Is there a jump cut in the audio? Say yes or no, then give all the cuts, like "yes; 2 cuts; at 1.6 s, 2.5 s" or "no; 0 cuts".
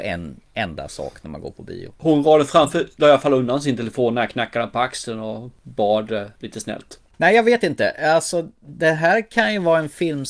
no; 0 cuts